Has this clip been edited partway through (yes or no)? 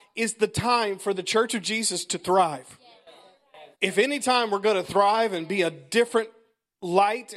yes